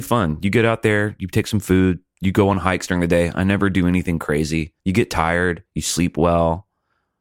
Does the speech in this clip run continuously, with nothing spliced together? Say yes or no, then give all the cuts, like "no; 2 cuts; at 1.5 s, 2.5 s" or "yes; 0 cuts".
no; 2 cuts; at 4.8 s, 5.7 s